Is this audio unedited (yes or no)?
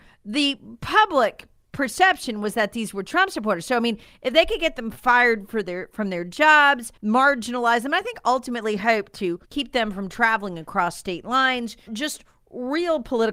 no